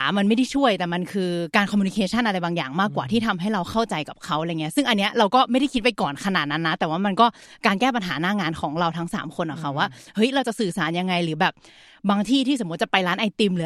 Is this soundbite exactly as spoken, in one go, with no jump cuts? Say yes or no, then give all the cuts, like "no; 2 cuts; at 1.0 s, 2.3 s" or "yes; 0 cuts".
yes; 0 cuts